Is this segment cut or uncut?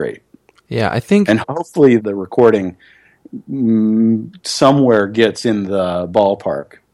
cut